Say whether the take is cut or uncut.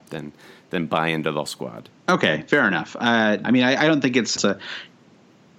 cut